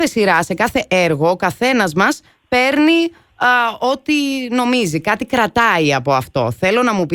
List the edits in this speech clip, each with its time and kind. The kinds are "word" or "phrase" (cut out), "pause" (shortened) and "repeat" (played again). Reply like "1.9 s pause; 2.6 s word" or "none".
none